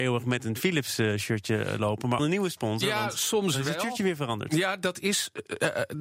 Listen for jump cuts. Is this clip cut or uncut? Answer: cut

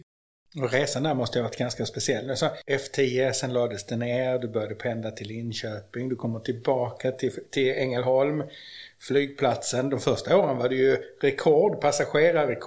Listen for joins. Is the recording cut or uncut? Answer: uncut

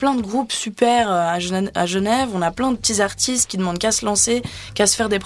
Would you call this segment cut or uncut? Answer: uncut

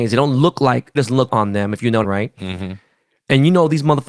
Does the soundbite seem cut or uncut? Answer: cut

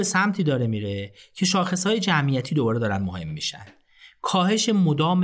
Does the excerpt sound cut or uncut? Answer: uncut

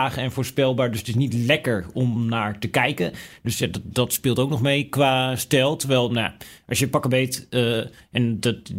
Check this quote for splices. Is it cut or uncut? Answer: uncut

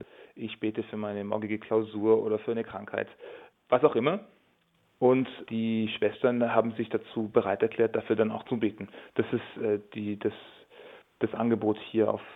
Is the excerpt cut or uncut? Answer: uncut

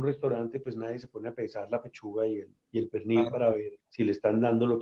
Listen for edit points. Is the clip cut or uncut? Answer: cut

